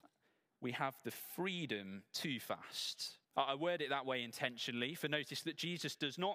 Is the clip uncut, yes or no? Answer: no